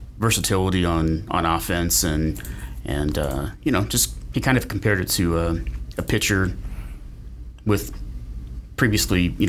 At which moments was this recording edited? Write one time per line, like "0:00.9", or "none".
none